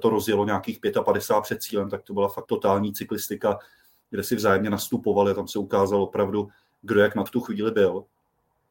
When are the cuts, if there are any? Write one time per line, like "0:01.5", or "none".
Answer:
0:02.5
0:07.3